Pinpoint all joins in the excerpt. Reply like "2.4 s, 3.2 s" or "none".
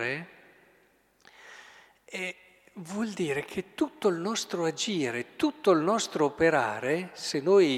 none